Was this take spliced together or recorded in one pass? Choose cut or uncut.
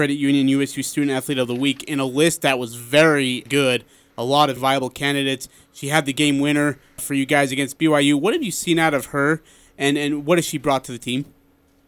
cut